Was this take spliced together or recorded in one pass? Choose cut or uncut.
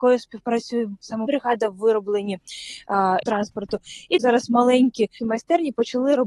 cut